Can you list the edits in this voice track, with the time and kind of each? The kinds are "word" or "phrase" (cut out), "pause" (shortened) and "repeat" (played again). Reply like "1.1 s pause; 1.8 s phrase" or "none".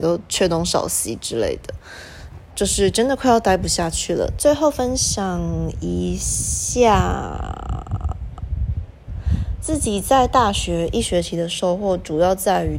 2.5 s word